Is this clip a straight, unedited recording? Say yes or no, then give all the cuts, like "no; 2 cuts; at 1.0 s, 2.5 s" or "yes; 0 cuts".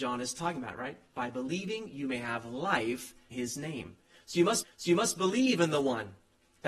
no; 2 cuts; at 3.3 s, 4.6 s